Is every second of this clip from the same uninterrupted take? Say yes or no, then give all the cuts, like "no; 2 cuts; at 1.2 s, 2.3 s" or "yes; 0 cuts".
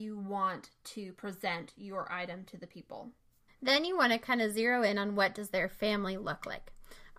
no; 1 cut; at 3.5 s